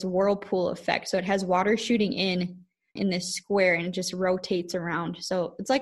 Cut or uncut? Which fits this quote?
cut